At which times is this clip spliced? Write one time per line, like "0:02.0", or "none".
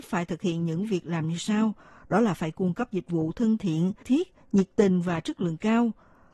0:04.0